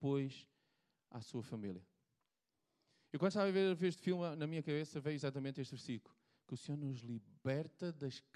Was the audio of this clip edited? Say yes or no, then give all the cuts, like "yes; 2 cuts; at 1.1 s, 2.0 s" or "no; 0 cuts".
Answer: no; 0 cuts